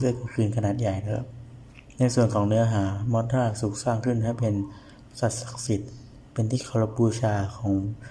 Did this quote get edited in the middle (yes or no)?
no